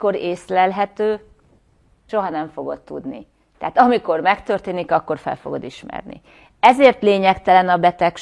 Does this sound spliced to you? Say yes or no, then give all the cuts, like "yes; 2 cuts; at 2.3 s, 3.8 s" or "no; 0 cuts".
no; 0 cuts